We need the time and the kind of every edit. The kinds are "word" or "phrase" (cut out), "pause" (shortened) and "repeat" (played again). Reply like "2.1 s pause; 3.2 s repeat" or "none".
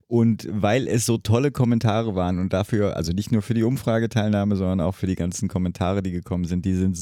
none